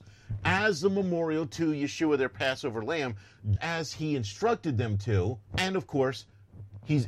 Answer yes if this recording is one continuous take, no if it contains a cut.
no